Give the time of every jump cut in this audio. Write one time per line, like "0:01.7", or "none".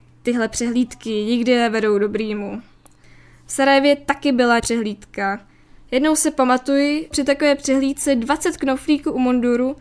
0:04.6
0:07.1